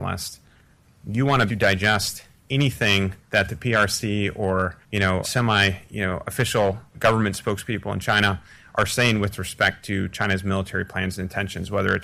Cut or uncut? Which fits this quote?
cut